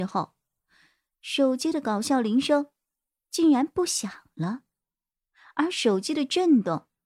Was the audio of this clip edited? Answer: no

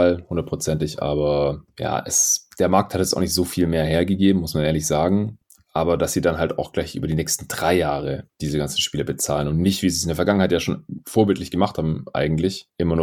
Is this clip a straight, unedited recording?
yes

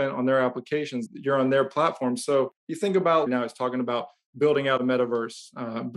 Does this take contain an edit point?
yes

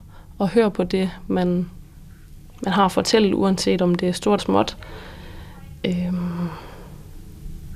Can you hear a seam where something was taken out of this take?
yes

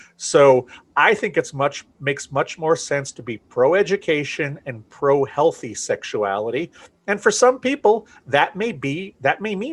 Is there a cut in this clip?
no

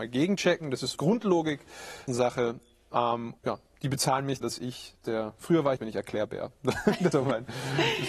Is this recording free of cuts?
no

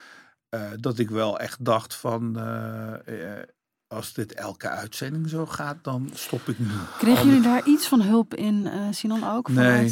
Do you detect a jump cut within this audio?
no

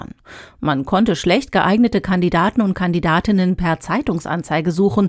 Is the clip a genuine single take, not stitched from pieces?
yes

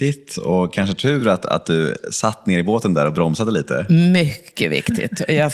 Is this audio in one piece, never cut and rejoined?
yes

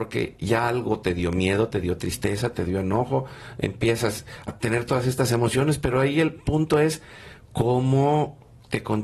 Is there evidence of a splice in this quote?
yes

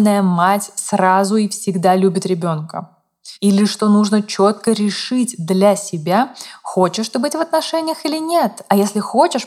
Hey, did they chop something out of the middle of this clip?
yes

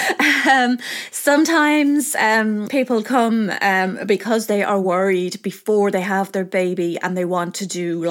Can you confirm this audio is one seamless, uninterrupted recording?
yes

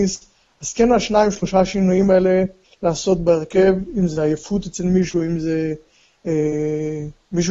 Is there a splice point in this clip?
no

